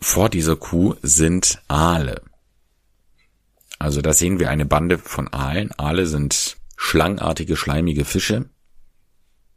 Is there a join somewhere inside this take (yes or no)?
no